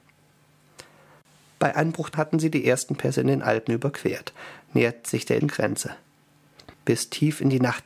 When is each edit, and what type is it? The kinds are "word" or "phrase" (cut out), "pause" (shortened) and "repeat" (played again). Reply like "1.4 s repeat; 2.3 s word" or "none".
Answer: 2.1 s word; 5.4 s word; 6.7 s pause